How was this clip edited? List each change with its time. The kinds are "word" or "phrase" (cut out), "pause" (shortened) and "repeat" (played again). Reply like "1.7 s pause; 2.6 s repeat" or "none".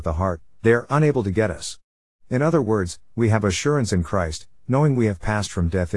none